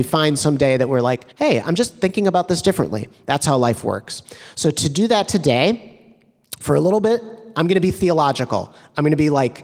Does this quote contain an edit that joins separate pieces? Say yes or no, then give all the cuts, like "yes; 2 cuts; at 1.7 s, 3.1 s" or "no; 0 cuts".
yes; 1 cut; at 1.3 s